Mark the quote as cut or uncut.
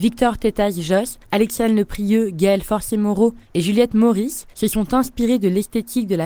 cut